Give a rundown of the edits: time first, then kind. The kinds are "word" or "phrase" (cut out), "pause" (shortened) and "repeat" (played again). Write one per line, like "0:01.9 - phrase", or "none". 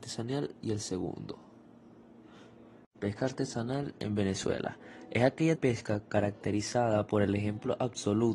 0:05.6 - phrase